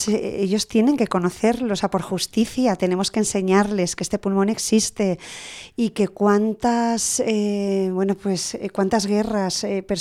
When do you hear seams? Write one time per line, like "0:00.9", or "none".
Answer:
none